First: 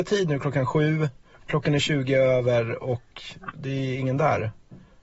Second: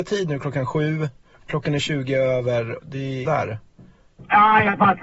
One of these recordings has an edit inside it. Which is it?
second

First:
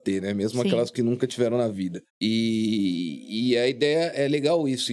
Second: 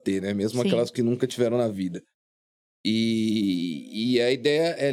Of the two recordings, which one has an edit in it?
first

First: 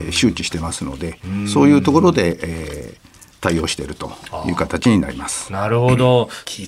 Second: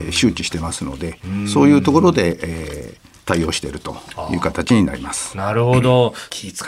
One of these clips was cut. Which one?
second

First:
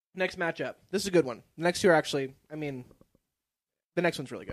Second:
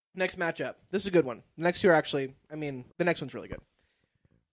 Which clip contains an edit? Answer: second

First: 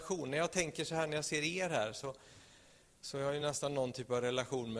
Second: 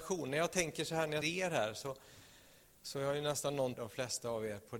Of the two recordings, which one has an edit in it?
second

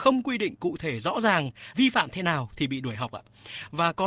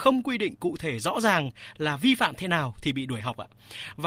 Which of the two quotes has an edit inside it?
first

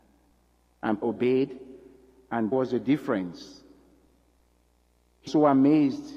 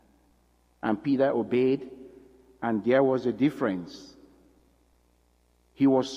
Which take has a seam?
first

